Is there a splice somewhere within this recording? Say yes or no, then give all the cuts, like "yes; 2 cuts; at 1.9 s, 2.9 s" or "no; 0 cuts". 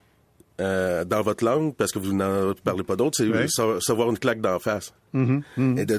no; 0 cuts